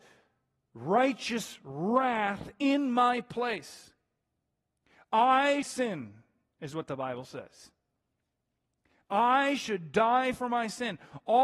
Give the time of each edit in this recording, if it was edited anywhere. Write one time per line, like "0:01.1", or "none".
0:05.6

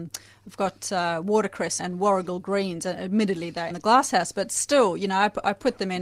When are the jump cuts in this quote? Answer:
0:01.8
0:03.7

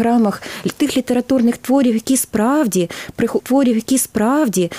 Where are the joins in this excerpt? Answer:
0:03.4

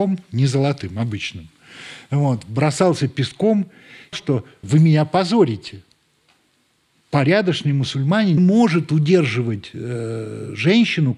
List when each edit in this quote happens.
0:04.1
0:04.6
0:08.4

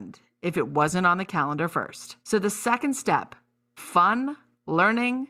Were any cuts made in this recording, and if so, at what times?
0:02.2
0:03.8

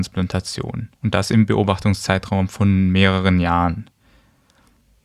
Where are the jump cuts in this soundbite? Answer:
0:01.0

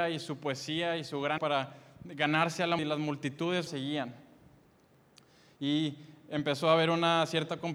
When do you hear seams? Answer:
0:01.4
0:02.8
0:03.7

